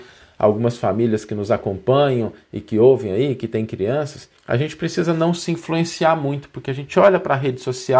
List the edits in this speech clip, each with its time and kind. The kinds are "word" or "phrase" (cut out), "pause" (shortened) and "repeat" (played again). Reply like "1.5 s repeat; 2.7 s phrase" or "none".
4.4 s pause